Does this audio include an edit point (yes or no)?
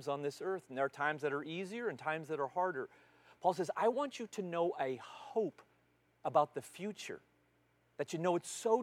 no